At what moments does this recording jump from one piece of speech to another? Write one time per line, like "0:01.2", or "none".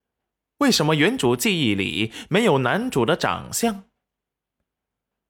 none